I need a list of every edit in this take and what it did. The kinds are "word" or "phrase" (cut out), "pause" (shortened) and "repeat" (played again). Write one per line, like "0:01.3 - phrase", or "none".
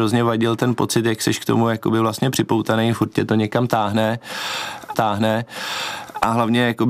0:04.9 - repeat